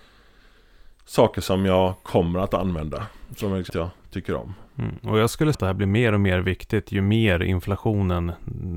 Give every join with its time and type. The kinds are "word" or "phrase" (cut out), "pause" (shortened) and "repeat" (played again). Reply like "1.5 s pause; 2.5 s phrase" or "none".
3.7 s phrase; 5.5 s word